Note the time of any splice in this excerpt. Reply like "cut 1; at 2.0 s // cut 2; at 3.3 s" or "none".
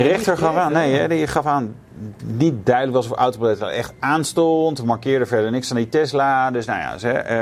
none